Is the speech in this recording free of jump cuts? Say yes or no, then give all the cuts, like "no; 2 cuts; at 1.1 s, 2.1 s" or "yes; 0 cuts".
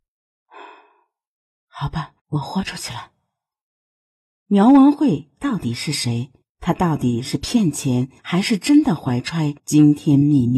no; 4 cuts; at 2.2 s, 6.4 s, 8.2 s, 9.6 s